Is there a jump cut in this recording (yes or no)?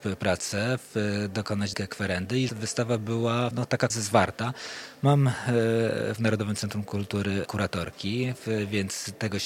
yes